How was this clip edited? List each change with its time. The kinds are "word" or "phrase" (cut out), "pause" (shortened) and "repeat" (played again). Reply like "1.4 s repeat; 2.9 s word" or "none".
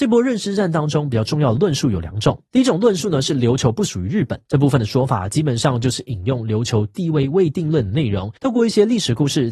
2.5 s pause; 4.5 s pause; 8.4 s pause